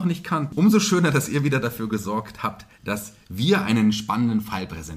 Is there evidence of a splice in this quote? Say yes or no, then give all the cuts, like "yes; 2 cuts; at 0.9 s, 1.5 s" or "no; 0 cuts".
no; 0 cuts